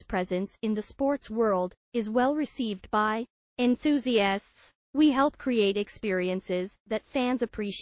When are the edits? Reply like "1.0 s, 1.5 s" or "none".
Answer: 4.8 s